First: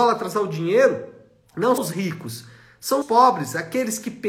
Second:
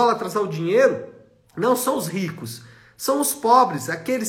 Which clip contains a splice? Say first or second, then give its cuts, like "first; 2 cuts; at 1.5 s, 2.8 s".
first; 2 cuts; at 1.8 s, 3.0 s